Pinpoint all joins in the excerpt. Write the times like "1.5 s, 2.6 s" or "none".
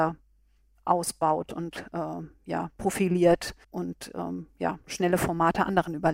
3.6 s